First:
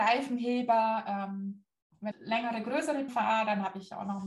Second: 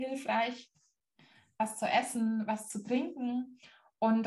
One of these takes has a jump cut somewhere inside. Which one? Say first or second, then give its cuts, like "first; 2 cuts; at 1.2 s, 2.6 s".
first; 2 cuts; at 2.1 s, 3.1 s